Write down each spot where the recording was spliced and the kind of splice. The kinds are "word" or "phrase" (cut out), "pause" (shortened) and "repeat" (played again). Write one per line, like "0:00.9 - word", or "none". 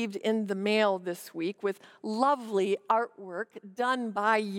none